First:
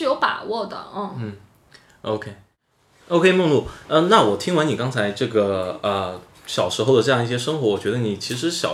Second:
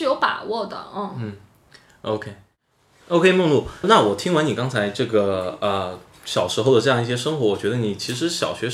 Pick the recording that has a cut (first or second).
second